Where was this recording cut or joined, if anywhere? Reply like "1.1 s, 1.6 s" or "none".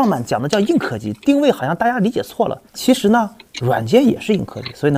2.7 s